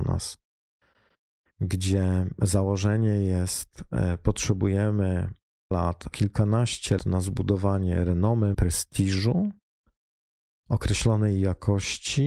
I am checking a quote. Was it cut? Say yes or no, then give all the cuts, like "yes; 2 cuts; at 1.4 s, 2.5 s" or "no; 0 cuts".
yes; 4 cuts; at 5.7 s, 6.1 s, 7.0 s, 8.5 s